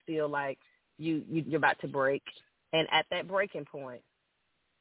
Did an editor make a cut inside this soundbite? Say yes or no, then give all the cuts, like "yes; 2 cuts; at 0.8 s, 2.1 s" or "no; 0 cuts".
yes; 2 cuts; at 1.4 s, 2.5 s